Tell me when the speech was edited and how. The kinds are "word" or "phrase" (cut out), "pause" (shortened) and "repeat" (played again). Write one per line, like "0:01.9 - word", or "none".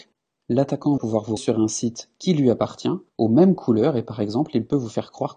0:01.0 - word
0:01.4 - word
0:03.1 - pause